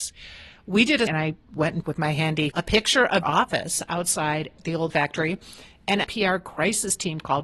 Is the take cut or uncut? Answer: cut